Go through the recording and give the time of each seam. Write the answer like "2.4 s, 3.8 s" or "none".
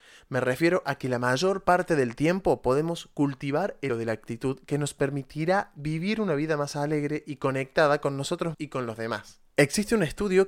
3.9 s, 8.5 s, 9.5 s